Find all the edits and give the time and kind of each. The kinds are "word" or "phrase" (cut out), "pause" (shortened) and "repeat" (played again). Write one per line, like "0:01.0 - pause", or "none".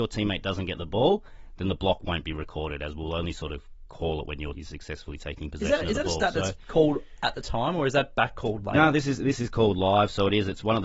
0:04.5 - word